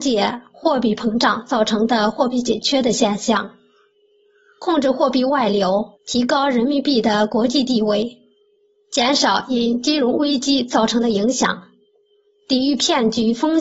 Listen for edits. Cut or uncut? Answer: cut